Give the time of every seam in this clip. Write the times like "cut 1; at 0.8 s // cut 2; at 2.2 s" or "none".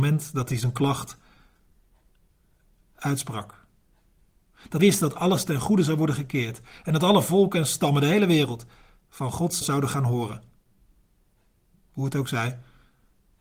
cut 1; at 4.8 s // cut 2; at 9.6 s

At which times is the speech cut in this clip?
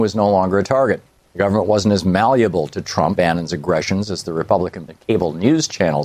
cut 1; at 1.2 s // cut 2; at 3.2 s // cut 3; at 4.9 s

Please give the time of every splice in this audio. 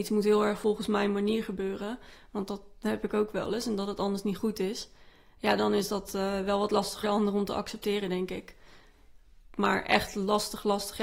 cut 1; at 7.0 s

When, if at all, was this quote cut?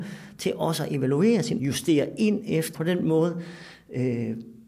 cut 1; at 1.6 s // cut 2; at 2.7 s

